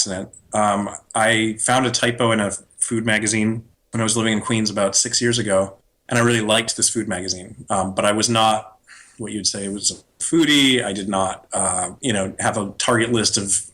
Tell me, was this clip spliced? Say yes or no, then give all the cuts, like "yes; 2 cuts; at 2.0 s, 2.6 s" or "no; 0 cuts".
no; 0 cuts